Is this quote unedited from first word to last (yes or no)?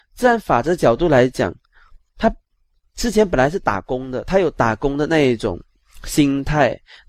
yes